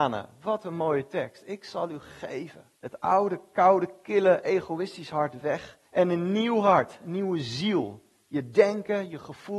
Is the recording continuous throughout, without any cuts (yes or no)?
no